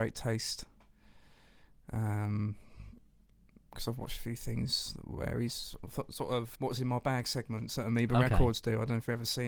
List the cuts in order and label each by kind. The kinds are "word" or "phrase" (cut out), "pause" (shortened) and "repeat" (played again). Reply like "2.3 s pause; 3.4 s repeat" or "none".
6.6 s word